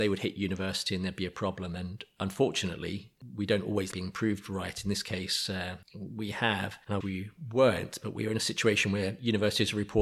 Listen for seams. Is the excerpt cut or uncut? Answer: cut